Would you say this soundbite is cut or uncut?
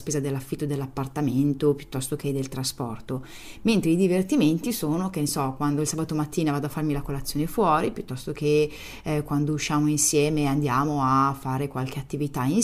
uncut